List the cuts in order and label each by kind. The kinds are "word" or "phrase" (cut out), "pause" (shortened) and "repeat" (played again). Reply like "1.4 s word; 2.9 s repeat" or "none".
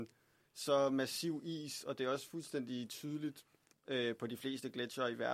3.7 s pause